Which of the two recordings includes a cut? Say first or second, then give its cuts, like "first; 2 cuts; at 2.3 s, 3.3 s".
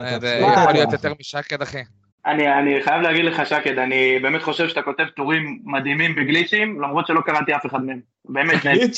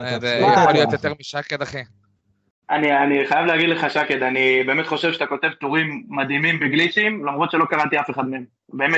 first; 1 cut; at 2.1 s